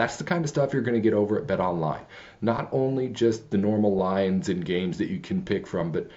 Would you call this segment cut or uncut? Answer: uncut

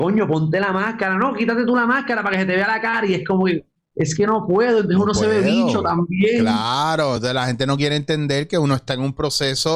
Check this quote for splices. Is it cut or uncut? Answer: uncut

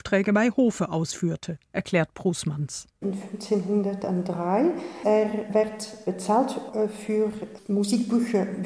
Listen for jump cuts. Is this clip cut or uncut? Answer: uncut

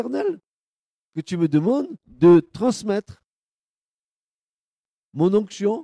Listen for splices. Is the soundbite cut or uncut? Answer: cut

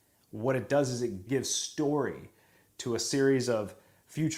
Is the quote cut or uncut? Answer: cut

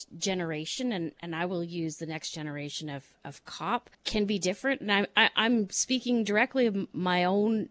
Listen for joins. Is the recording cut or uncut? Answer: cut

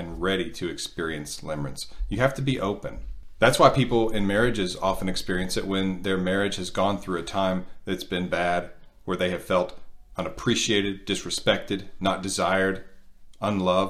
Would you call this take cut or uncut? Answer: uncut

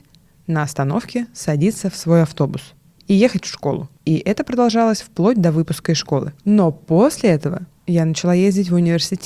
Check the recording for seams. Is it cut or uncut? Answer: cut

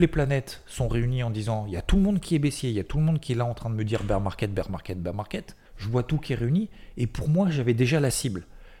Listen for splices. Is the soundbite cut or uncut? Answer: cut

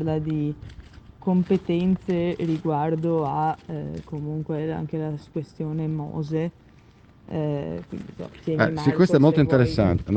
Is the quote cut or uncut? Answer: uncut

